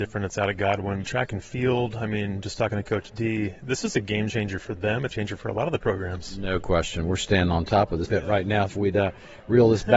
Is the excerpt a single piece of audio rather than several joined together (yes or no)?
no